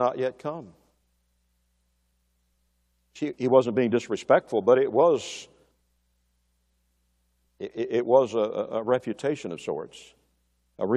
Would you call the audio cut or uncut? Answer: uncut